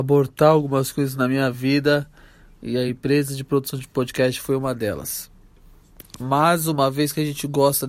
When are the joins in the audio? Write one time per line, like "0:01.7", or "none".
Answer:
none

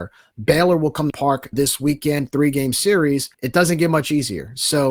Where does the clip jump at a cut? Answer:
0:01.1
0:01.5
0:03.3

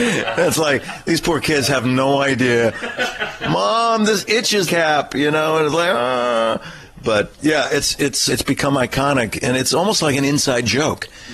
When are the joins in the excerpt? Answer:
0:04.7
0:07.3
0:08.3

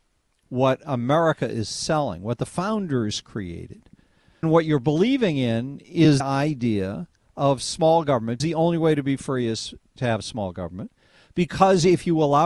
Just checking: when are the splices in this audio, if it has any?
0:04.4
0:06.2
0:08.4

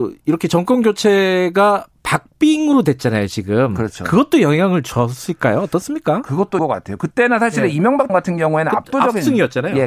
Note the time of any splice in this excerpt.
0:06.6
0:08.1

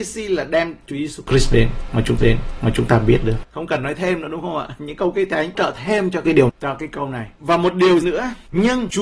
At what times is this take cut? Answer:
0:02.2
0:05.5
0:06.5
0:07.3
0:08.0

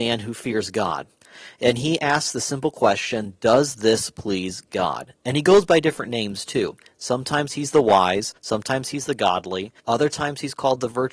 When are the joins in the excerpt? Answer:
0:08.4
0:09.8

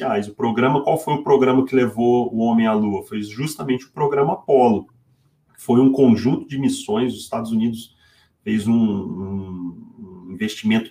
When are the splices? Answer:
none

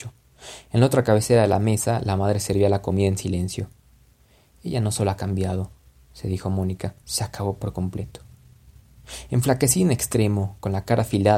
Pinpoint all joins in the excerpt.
0:07.0

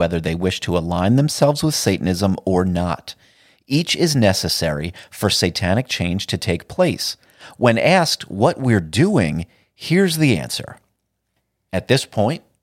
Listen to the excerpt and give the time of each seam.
none

